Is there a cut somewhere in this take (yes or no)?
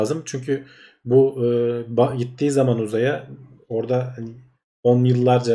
no